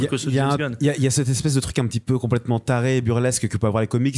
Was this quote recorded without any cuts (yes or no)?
yes